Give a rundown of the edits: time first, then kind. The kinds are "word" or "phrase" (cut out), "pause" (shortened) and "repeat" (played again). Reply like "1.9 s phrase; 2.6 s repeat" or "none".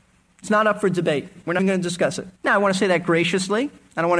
1.6 s word; 2.4 s pause